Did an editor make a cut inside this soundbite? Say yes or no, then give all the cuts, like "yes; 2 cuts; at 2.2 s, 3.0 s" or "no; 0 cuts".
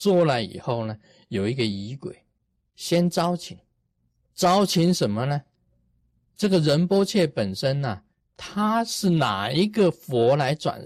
no; 0 cuts